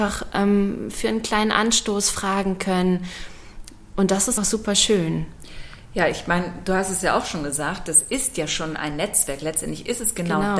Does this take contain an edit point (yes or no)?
yes